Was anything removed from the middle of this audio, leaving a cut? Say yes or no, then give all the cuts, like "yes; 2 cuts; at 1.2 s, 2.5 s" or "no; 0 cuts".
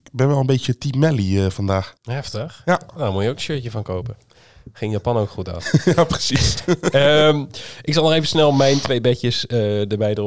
yes; 1 cut; at 2.0 s